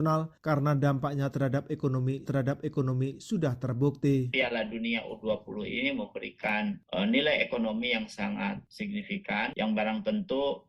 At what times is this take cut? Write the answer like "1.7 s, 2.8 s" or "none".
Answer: 2.3 s